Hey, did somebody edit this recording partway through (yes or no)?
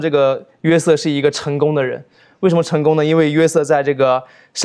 no